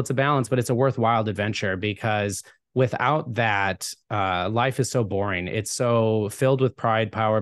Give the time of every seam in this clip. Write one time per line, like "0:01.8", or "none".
none